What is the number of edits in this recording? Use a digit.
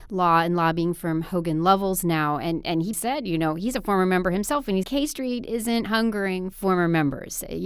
3